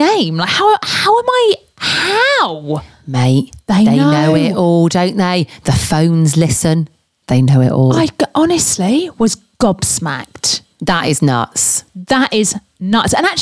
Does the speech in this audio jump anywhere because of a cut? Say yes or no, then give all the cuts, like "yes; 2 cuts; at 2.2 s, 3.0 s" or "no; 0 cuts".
no; 0 cuts